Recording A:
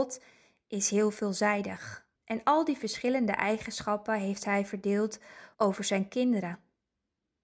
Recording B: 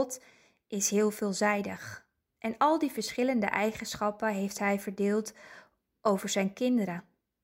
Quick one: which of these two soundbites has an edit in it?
A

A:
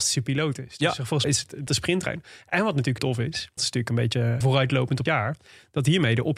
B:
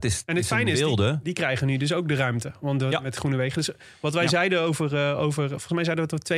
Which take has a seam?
A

